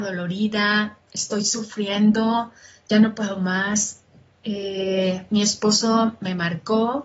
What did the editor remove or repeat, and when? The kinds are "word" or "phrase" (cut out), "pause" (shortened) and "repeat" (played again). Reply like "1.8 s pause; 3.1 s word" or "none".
none